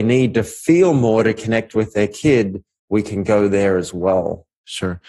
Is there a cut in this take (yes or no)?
no